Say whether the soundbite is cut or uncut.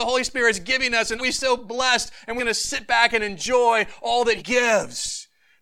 cut